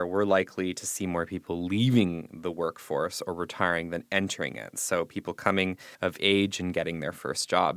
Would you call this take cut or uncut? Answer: cut